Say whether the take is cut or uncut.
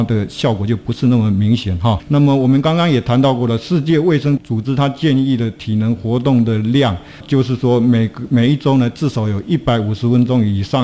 uncut